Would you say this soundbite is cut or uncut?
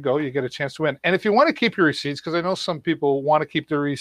uncut